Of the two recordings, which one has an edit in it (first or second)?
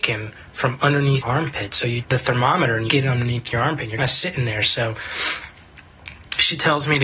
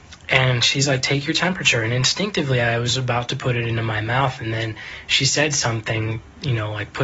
first